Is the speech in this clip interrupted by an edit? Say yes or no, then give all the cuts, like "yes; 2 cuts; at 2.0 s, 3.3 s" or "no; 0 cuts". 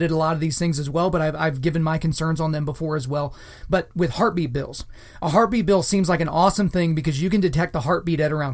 no; 0 cuts